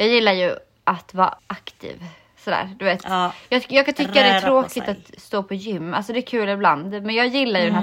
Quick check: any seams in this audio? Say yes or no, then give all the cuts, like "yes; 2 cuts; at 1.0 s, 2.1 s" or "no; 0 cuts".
yes; 1 cut; at 1.4 s